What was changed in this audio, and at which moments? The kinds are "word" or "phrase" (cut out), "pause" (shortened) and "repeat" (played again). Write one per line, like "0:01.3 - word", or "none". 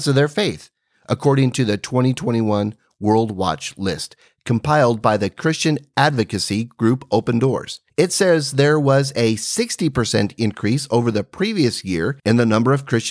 0:07.9 - pause
0:12.2 - pause